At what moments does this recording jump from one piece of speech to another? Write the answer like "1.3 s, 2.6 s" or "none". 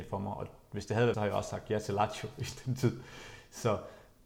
1.1 s